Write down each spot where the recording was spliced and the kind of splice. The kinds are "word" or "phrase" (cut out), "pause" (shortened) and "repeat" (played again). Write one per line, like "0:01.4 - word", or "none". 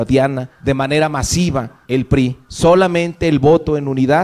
0:01.9 - phrase